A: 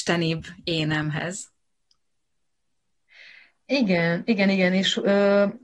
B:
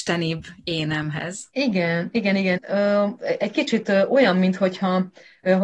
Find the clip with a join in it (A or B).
B